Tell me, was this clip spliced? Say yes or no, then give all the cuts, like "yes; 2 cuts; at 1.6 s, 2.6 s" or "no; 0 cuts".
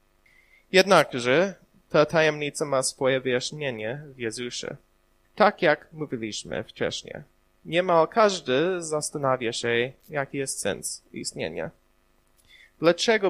no; 0 cuts